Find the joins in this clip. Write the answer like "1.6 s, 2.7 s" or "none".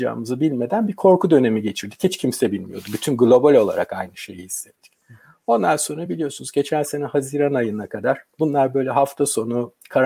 none